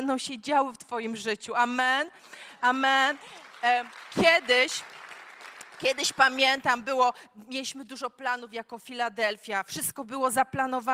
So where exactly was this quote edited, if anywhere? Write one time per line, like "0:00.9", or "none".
none

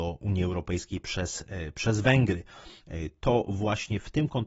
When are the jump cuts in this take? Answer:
none

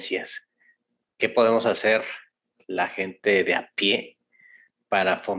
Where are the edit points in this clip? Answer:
none

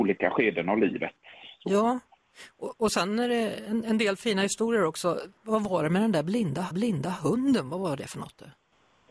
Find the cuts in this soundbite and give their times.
0:05.4
0:06.7

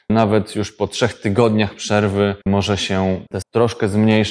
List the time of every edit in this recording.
0:02.4
0:03.4

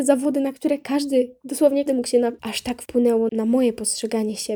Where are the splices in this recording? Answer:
0:01.9
0:02.4
0:03.3

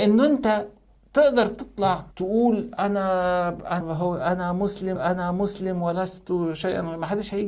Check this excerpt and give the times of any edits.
0:02.1
0:03.8
0:05.0

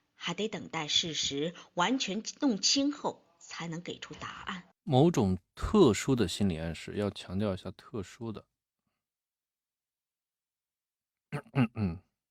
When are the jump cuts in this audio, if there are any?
0:04.7

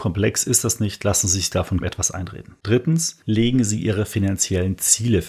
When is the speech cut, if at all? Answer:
0:01.8

